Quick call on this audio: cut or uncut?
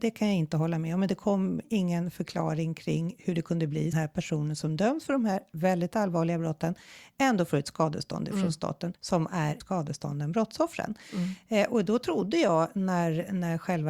cut